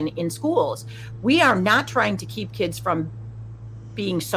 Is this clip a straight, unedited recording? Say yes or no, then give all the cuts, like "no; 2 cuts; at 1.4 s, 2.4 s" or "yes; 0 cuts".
yes; 0 cuts